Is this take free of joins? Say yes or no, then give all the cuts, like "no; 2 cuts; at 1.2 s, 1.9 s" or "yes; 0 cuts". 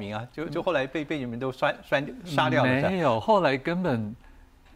yes; 0 cuts